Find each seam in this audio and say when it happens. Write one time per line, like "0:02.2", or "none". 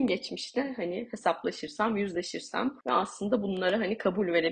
0:02.8